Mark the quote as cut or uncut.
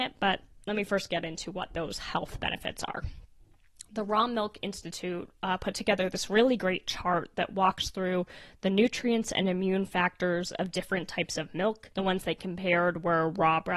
cut